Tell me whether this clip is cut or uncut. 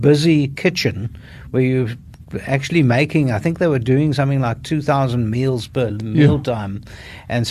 uncut